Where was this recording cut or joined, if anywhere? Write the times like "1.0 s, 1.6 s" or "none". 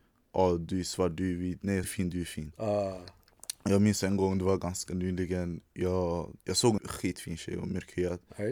1.8 s, 6.4 s, 6.8 s